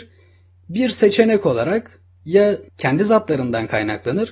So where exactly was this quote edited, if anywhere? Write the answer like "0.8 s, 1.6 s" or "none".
2.7 s